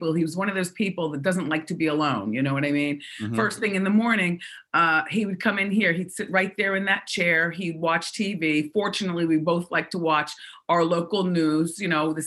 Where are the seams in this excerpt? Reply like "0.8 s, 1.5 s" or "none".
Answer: none